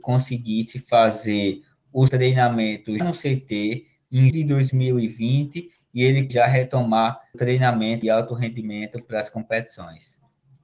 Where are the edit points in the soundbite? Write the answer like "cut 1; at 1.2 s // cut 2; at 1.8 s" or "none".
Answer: cut 1; at 2.1 s // cut 2; at 3.0 s // cut 3; at 4.3 s // cut 4; at 6.3 s // cut 5; at 7.3 s // cut 6; at 8.0 s